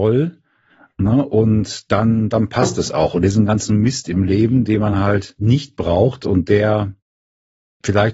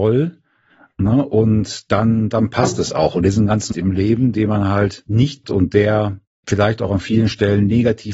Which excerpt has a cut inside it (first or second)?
second